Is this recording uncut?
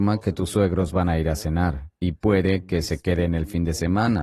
no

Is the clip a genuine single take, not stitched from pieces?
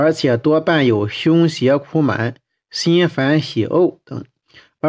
yes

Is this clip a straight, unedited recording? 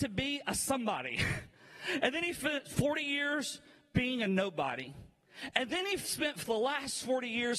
yes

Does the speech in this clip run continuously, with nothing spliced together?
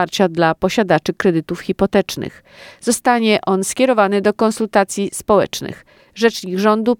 yes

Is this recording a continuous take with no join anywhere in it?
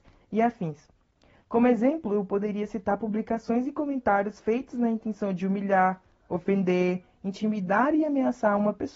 yes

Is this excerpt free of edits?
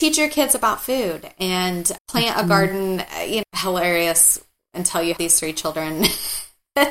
no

